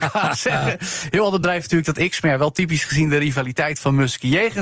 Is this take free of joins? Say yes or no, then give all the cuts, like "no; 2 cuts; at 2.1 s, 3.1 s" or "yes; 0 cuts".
yes; 0 cuts